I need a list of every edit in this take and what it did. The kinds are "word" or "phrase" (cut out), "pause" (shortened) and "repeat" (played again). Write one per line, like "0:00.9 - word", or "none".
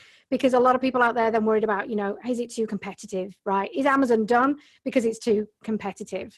none